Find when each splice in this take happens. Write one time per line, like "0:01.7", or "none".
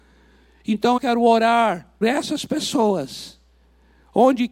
0:01.0
0:02.0